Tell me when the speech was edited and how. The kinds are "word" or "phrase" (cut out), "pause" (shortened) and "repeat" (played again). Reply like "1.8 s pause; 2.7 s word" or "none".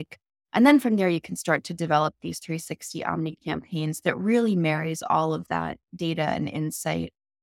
none